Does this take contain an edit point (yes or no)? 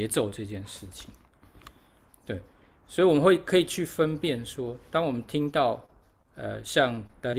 no